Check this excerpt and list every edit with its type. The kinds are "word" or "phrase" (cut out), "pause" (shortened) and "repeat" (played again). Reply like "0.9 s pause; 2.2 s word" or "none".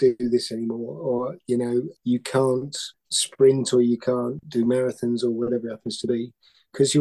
2.0 s pause